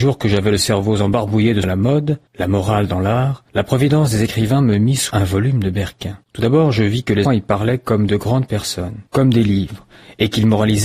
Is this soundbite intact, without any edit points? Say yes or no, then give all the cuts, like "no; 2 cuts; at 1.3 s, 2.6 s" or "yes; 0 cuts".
no; 7 cuts; at 1.6 s, 2.3 s, 3.5 s, 5.1 s, 6.2 s, 7.2 s, 9.1 s